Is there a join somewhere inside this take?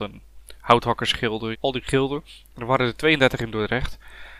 yes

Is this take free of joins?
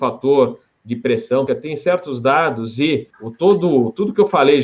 no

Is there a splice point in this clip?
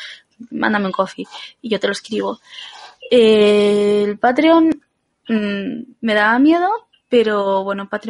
no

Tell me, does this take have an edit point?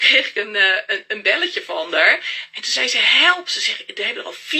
no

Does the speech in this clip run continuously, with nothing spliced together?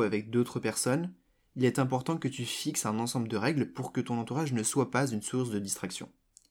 yes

